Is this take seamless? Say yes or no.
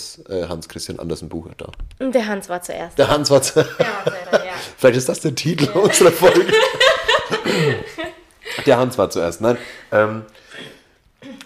no